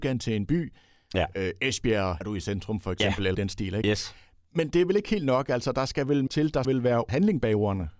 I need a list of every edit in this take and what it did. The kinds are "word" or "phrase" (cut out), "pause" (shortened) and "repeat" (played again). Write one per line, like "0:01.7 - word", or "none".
0:02.2 - word
0:03.3 - word
0:06.3 - word
0:06.6 - word